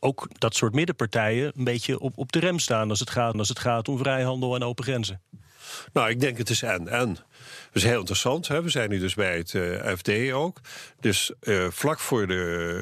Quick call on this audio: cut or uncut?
cut